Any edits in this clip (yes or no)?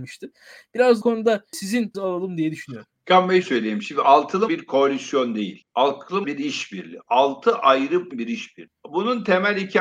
yes